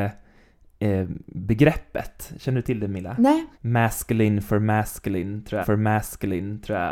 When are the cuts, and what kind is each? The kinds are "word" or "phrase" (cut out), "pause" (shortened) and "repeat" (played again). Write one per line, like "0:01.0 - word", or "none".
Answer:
0:03.5 - pause
0:05.6 - repeat